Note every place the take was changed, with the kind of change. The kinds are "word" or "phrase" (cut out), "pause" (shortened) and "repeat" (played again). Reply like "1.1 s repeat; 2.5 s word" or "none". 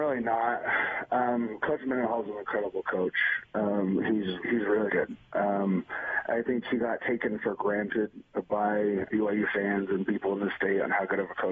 4.4 s word; 4.9 s word; 9.1 s word